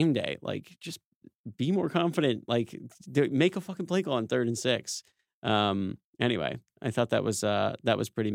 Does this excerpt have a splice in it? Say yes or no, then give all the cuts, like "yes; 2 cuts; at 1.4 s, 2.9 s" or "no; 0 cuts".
no; 0 cuts